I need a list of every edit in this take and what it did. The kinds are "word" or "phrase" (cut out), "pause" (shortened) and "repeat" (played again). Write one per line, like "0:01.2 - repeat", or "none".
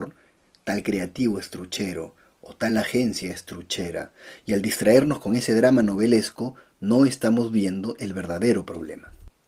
none